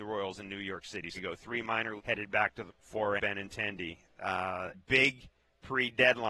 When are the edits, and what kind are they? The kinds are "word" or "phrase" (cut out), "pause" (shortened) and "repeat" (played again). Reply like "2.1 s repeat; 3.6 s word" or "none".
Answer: 1.2 s word; 2.0 s word; 2.7 s word; 3.2 s word; 4.7 s word